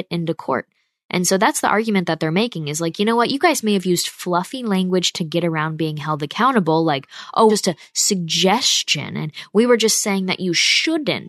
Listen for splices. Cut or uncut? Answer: cut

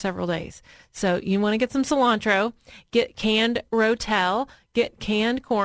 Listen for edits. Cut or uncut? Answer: uncut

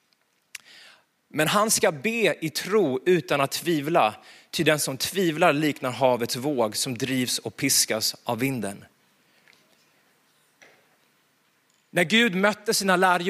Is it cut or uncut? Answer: uncut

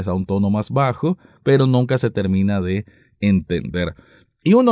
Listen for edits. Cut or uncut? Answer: uncut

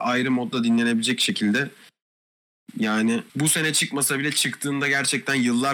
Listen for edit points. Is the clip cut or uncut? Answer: cut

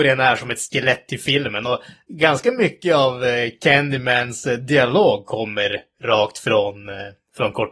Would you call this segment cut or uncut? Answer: uncut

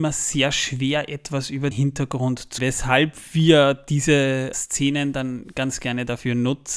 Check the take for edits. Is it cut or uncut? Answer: cut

